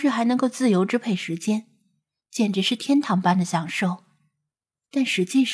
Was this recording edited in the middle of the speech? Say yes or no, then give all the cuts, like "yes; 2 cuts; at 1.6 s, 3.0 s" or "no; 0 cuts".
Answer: no; 0 cuts